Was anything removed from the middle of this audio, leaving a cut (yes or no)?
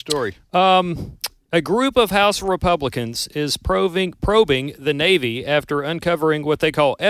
no